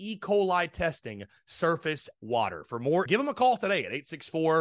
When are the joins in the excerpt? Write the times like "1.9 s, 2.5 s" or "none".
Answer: 2.2 s, 3.1 s

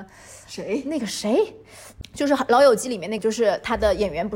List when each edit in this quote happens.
3.2 s

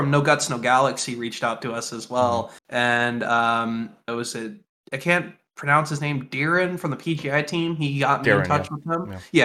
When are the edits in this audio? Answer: 2.6 s, 4.1 s, 4.7 s

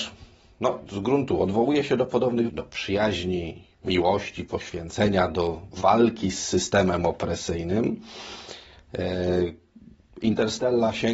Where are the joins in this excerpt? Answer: 2.5 s

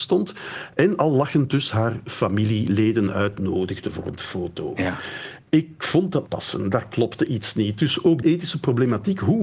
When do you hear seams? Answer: 6.3 s, 8.2 s

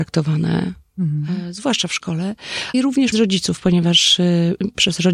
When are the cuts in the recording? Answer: 2.7 s, 3.1 s

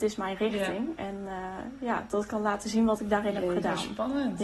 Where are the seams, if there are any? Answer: none

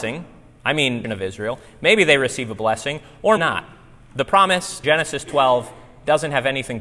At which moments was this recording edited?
1.0 s, 3.4 s, 4.8 s

